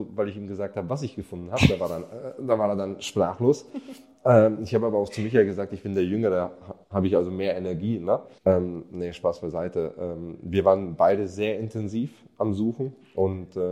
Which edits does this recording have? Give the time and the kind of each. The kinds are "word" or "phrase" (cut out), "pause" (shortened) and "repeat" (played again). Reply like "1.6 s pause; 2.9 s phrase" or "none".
6.8 s pause; 8.4 s pause